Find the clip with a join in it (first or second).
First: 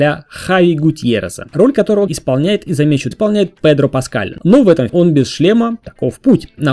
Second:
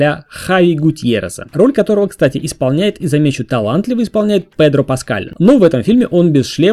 first